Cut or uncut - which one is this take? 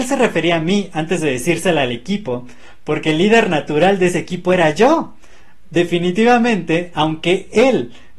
uncut